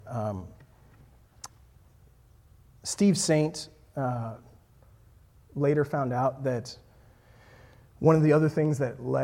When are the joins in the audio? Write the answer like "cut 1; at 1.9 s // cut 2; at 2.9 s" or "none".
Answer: none